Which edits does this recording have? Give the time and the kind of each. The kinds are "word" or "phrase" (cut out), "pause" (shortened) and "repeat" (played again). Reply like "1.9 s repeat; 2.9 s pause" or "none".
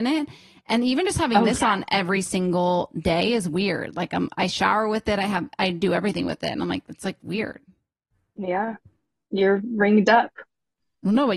none